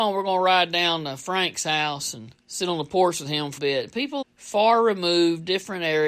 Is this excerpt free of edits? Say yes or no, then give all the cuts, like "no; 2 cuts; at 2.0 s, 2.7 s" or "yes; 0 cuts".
no; 3 cuts; at 2.4 s, 3.6 s, 4.2 s